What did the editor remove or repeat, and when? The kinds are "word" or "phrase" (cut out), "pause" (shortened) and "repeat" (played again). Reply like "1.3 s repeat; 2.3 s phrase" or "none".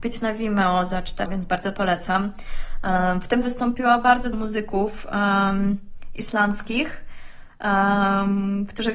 1.3 s word; 3.4 s word; 4.3 s word